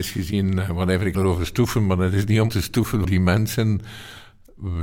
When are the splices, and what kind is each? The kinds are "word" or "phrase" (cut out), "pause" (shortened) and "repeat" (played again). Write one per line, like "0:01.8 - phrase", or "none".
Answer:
0:01.1 - word
0:02.5 - word
0:03.0 - word